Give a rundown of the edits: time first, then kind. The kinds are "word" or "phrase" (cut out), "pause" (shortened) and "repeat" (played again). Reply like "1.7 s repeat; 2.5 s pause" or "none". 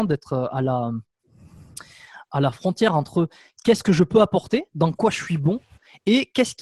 none